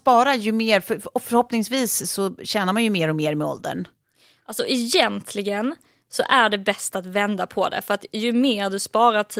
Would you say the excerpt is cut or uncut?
uncut